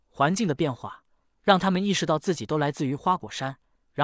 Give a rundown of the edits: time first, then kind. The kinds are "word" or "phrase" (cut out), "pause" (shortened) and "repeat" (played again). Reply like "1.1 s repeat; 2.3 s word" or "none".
none